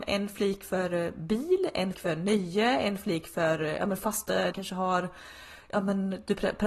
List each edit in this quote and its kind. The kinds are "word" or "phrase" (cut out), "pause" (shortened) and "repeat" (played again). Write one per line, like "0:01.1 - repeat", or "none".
0:01.9 - word
0:04.5 - phrase